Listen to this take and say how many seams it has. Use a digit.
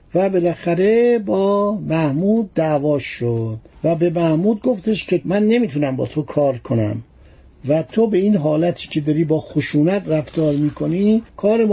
0